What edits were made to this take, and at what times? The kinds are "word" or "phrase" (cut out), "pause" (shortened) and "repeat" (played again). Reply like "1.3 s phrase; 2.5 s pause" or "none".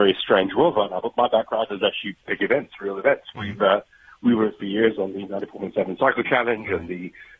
none